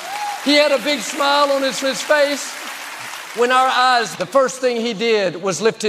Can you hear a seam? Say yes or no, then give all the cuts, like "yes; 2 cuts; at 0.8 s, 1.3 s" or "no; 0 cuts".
yes; 2 cuts; at 1.8 s, 4.1 s